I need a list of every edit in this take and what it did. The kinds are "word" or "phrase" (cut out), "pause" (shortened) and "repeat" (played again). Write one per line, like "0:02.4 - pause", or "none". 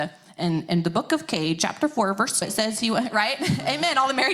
0:02.4 - word